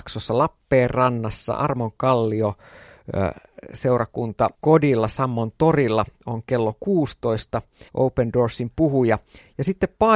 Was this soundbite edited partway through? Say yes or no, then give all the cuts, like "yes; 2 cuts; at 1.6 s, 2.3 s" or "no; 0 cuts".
yes; 2 cuts; at 4.5 s, 7.9 s